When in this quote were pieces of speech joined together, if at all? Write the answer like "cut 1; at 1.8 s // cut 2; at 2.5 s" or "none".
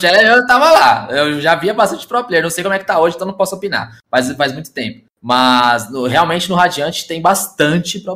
cut 1; at 5.1 s